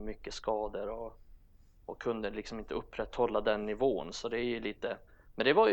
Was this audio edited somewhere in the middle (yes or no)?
no